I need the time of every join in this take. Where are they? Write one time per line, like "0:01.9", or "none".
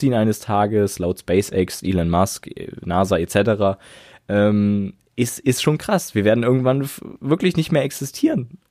none